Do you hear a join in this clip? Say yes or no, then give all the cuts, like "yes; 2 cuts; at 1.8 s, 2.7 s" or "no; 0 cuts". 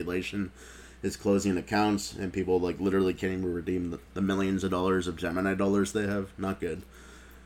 yes; 1 cut; at 4.1 s